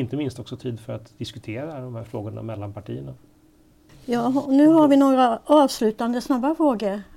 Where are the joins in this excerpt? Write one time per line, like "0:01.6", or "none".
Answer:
none